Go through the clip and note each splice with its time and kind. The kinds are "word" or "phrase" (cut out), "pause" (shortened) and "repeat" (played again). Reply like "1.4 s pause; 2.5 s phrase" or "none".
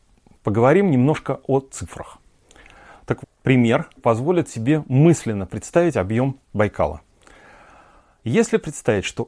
3.2 s phrase; 4.0 s word; 6.4 s pause

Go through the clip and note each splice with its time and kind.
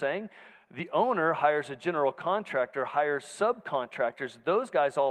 none

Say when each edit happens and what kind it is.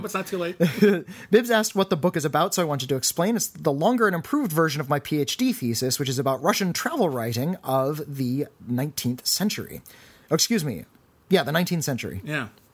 none

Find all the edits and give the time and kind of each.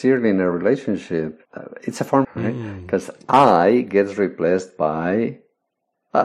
1.4 s pause; 2.2 s phrase

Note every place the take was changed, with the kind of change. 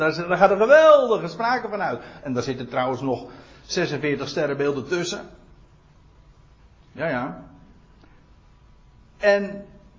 none

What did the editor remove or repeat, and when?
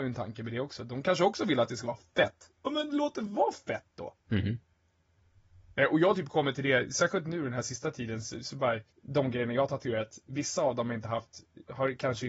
4.2 s pause; 8.9 s pause

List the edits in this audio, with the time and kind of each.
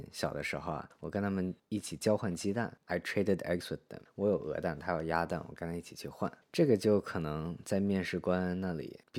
none

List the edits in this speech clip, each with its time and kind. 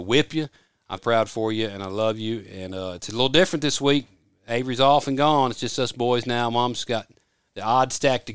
1.0 s word

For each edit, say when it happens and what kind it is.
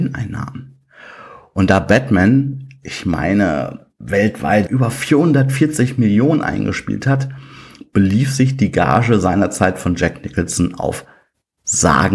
none

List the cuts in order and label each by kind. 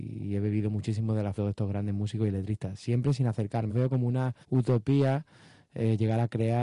1.4 s phrase; 3.7 s word; 4.4 s pause

